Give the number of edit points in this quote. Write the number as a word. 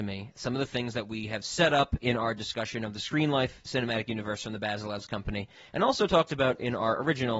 zero